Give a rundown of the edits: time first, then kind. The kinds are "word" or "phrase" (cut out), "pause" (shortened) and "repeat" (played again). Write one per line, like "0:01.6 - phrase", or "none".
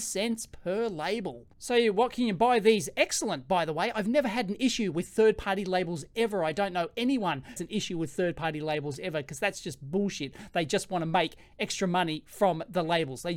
0:01.5 - pause
0:07.6 - phrase

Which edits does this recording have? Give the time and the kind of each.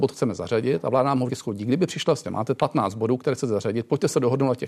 0:01.3 - word
0:02.2 - phrase
0:02.6 - word

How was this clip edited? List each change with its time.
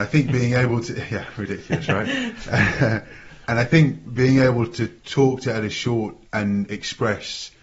0:05.0 - pause
0:06.2 - pause

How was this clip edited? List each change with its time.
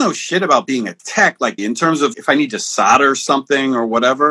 0:01.0 - pause
0:01.6 - word
0:02.1 - word

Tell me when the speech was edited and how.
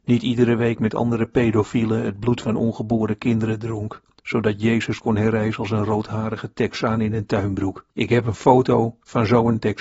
0:07.9 - pause

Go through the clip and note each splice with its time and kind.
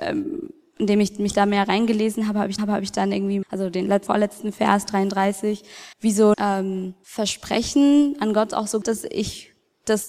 0:02.6 - repeat
0:03.4 - word
0:04.1 - phrase
0:05.9 - pause
0:06.3 - word
0:07.0 - pause
0:08.8 - word

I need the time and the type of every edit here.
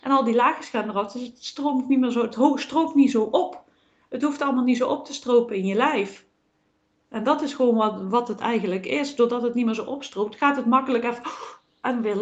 none

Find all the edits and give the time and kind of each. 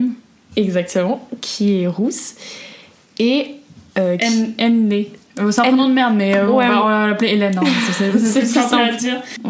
none

